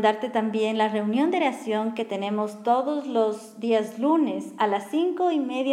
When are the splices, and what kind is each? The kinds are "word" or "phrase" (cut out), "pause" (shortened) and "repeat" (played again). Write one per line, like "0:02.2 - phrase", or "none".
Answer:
none